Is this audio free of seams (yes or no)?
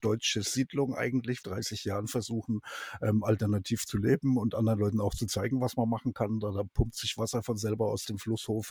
no